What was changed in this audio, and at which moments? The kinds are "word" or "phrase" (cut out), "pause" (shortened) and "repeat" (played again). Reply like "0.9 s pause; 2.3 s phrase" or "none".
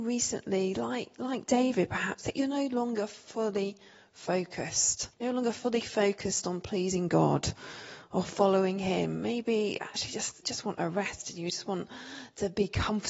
5.1 s pause; 10.4 s phrase